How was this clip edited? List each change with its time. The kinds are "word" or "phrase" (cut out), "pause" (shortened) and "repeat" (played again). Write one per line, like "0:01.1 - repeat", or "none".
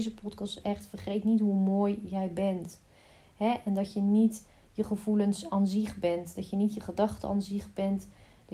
none